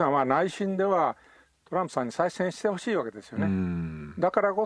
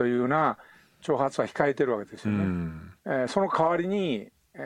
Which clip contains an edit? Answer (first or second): second